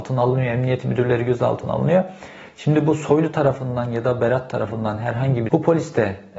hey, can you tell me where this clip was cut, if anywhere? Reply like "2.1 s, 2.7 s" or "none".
5.5 s